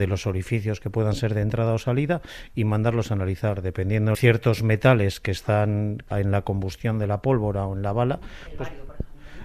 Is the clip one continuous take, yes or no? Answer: no